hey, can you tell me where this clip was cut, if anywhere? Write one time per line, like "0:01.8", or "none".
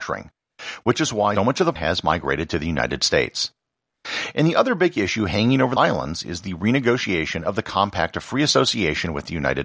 0:01.4
0:01.8
0:05.8